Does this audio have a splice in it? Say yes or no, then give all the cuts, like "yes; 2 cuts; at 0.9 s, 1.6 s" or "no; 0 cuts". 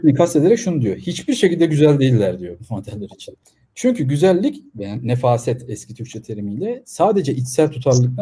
yes; 1 cut; at 3.4 s